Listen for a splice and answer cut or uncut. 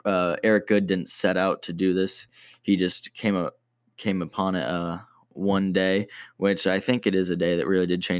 uncut